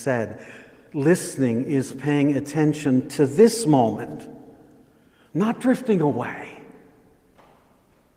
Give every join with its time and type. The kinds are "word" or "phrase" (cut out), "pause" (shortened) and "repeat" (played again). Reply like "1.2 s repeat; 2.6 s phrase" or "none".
none